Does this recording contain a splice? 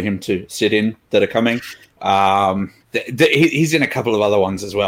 yes; 1 cut; at 2.8 s

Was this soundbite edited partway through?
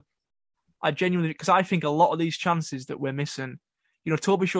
no; 0 cuts

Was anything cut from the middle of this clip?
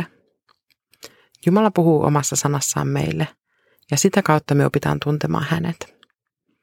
no; 0 cuts

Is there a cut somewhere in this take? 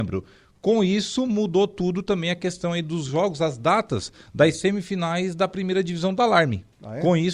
no; 0 cuts

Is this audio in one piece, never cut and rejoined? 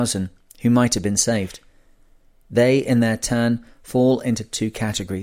yes; 0 cuts

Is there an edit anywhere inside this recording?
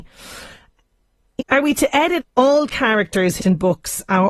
yes; 3 cuts; at 1.4 s, 2.2 s, 3.4 s

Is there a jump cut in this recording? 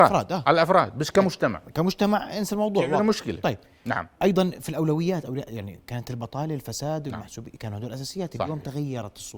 no; 0 cuts

